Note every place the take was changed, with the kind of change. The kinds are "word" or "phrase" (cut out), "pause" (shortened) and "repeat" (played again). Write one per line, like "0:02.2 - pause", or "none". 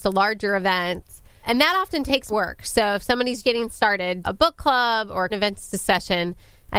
0:01.4 - word
0:02.3 - word
0:03.4 - word
0:04.2 - word
0:05.3 - word